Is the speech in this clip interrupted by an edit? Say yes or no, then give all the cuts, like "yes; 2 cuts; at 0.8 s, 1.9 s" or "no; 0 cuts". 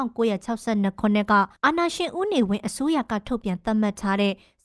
yes; 1 cut; at 1.6 s